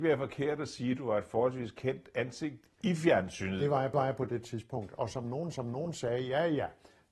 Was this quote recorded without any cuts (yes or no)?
no